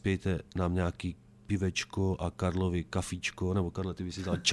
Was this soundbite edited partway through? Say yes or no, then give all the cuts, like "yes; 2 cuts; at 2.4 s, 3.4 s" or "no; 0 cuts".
no; 0 cuts